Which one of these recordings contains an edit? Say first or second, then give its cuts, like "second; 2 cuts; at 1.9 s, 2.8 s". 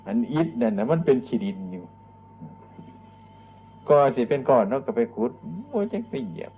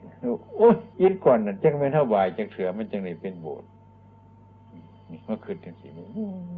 second; 1 cut; at 0.9 s